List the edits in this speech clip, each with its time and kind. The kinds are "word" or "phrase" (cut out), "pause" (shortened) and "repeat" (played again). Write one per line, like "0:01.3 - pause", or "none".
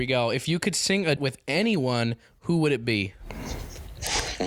0:01.2 - word